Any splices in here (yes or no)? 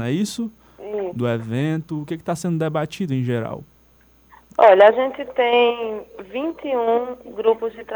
no